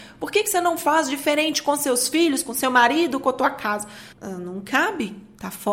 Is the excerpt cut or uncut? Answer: cut